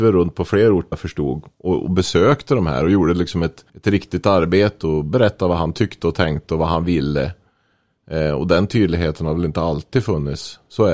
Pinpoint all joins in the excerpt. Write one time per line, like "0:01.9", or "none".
0:00.9
0:03.7